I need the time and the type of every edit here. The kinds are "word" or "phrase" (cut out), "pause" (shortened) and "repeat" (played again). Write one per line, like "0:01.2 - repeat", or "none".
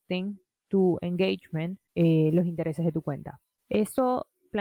none

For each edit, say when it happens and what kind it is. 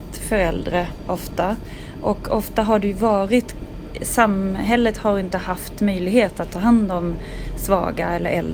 none

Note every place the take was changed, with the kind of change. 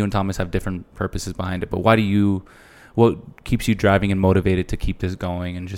none

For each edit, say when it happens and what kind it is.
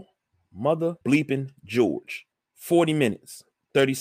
0:01.0 - pause
0:02.3 - pause

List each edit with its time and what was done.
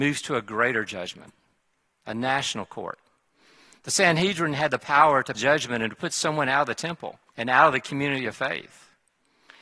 0:05.3 - word
0:07.3 - pause

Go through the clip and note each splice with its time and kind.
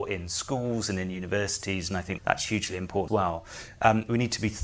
0:02.2 - word
0:03.1 - word

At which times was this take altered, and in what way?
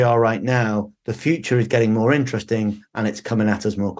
none

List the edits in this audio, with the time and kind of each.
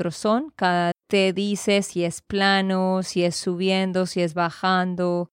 0:00.9 - word

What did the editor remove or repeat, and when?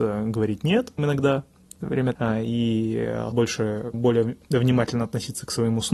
0:01.0 - word
0:02.1 - word
0:03.3 - word
0:03.9 - word

